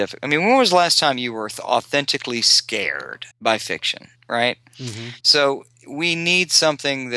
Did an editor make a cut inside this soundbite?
yes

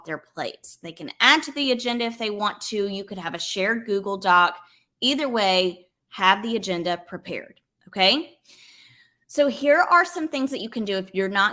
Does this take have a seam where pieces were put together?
no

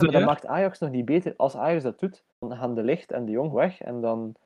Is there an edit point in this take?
yes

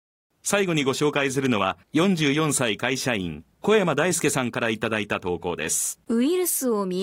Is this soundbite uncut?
no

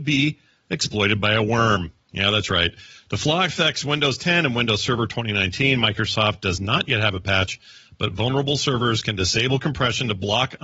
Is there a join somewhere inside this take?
no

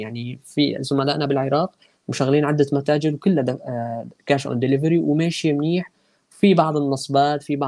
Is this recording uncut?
yes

